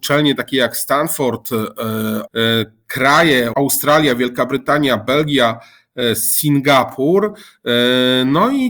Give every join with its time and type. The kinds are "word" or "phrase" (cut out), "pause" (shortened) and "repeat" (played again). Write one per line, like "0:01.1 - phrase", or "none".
0:02.3 - word
0:03.5 - word

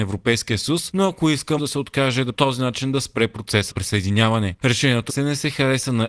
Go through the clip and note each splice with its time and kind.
0:01.6 - word
0:02.3 - phrase
0:03.7 - word
0:05.1 - word

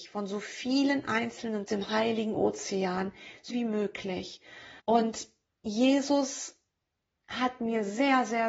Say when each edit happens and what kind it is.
0:01.7 - phrase
0:03.5 - word
0:04.8 - pause

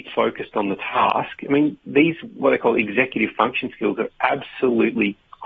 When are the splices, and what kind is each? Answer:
none

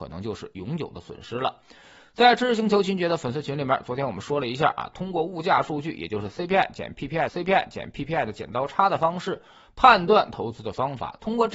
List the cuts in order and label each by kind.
0:07.3 - repeat

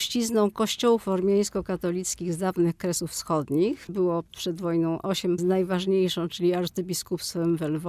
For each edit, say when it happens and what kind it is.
0:03.9 - word
0:05.4 - phrase

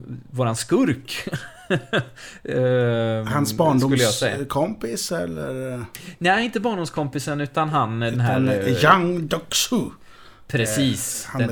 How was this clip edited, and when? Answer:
none

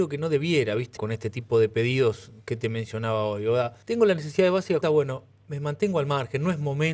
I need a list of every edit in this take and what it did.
0:01.0 - word
0:03.8 - pause
0:04.8 - word

